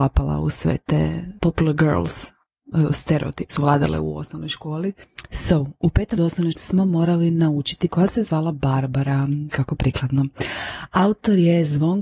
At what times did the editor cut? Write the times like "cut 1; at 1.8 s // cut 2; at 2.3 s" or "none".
cut 1; at 1.4 s // cut 2; at 3.5 s // cut 3; at 6.2 s // cut 4; at 6.5 s // cut 5; at 7.9 s